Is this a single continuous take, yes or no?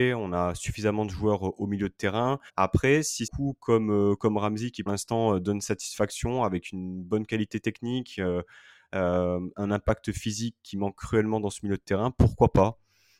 no